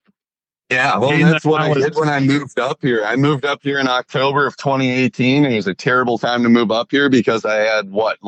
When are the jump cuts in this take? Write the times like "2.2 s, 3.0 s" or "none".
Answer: none